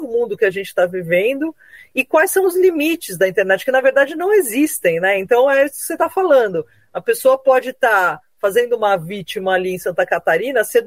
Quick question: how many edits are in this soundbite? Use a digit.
0